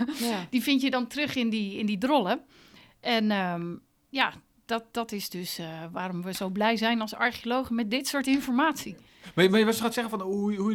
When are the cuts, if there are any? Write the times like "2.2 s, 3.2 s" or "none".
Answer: none